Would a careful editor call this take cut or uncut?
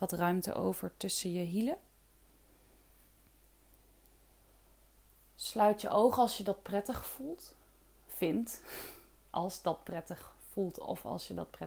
uncut